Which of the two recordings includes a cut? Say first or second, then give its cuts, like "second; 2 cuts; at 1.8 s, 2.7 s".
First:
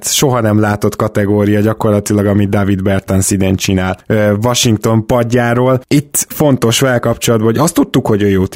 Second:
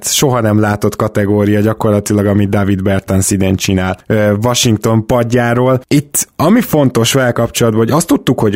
first; 1 cut; at 6.3 s